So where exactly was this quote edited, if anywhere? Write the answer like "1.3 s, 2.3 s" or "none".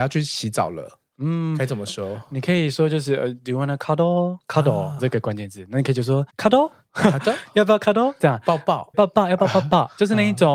5.0 s, 6.3 s, 8.9 s